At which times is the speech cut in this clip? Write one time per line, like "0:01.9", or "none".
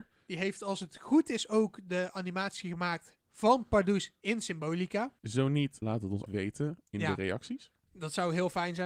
0:05.2
0:05.8
0:06.3